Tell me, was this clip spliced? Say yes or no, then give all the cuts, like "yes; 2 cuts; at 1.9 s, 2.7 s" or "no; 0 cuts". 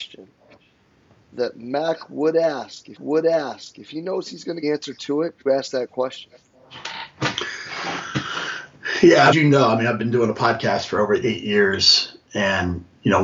yes; 4 cuts; at 3.0 s, 4.6 s, 5.5 s, 9.3 s